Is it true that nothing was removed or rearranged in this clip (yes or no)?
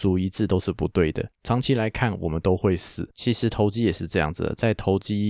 no